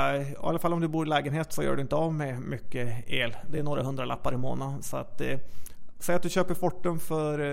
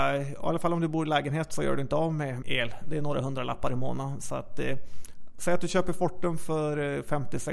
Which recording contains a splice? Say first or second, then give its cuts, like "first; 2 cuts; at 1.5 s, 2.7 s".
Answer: second; 1 cut; at 2.4 s